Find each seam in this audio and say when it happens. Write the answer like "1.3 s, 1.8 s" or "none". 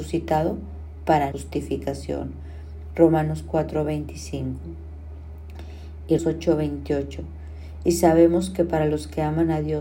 1.3 s, 6.2 s

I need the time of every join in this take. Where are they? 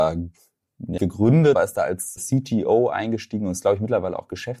1.0 s, 1.6 s, 2.2 s

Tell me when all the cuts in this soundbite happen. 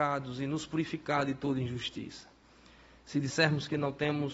none

